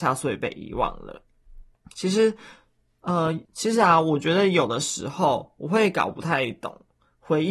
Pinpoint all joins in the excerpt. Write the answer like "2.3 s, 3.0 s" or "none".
1.7 s, 3.4 s